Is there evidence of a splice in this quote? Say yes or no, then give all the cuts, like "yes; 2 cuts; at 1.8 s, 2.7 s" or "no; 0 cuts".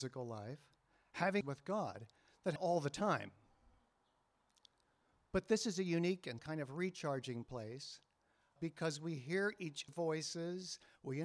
yes; 5 cuts; at 1.4 s, 2.6 s, 6.4 s, 8.6 s, 9.9 s